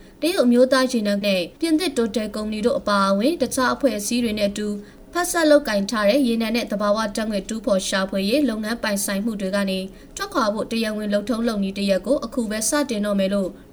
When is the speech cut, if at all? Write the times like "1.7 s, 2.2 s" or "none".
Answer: 1.2 s, 1.6 s